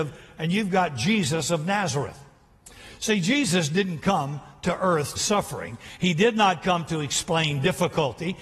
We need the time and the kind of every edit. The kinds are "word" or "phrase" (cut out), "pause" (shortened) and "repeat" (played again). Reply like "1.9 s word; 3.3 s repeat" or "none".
5.2 s phrase